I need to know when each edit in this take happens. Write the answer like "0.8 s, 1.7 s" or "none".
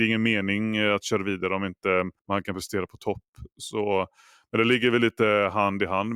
2.2 s